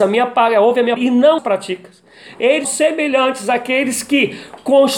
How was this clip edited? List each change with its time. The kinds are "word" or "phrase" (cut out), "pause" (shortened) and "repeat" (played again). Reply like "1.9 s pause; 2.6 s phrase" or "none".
1.0 s word; 1.4 s word; 2.6 s word